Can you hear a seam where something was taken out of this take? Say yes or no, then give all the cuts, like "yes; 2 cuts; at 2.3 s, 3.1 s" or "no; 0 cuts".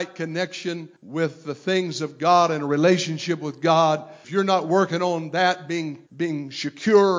yes; 3 cuts; at 1.0 s, 4.2 s, 6.1 s